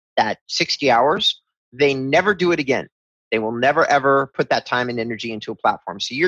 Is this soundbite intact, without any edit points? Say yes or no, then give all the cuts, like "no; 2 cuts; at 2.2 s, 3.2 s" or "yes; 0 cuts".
yes; 0 cuts